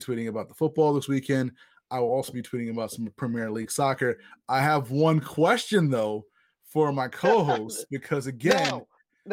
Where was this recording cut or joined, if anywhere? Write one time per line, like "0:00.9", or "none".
none